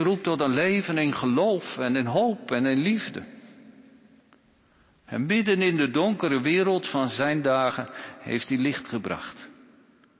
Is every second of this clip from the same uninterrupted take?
yes; 0 cuts

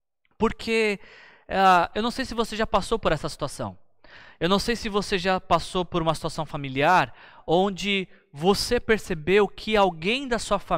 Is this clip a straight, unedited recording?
yes; 0 cuts

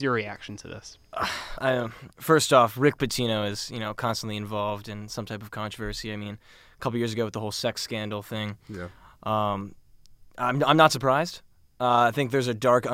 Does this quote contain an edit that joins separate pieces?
yes; 2 cuts; at 1.5 s, 2.1 s

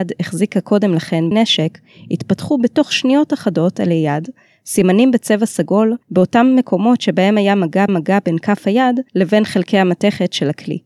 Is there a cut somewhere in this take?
yes; 4 cuts; at 1.3 s, 6.0 s, 7.9 s, 9.1 s

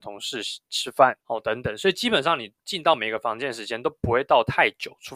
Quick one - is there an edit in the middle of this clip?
yes; 1 cut; at 1.2 s

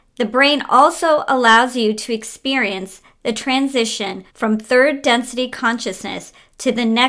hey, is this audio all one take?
no; 1 cut; at 4.3 s

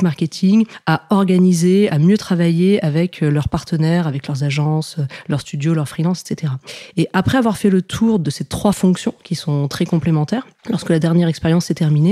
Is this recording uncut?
yes; 0 cuts

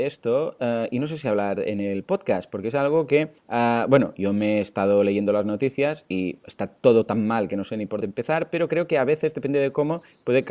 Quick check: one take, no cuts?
no; 2 cuts; at 3.4 s, 8.0 s

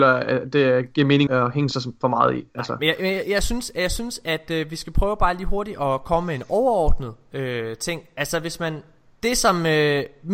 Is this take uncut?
no; 1 cut; at 1.3 s

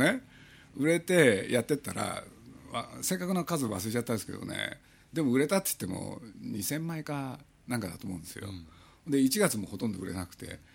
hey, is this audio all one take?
yes; 0 cuts

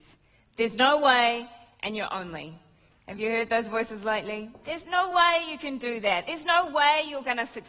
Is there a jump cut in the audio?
no; 0 cuts

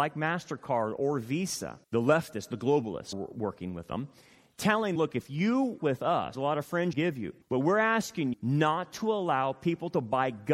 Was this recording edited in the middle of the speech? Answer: yes; 8 cuts; at 1.8 s, 3.1 s, 5.0 s, 5.8 s, 6.3 s, 6.9 s, 7.4 s, 8.3 s

